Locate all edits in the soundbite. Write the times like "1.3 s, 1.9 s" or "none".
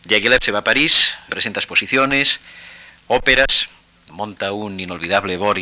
1.3 s